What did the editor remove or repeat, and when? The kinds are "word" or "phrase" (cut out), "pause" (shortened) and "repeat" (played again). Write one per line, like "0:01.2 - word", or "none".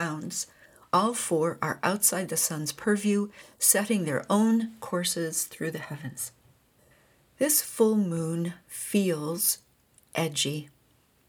0:06.8 - pause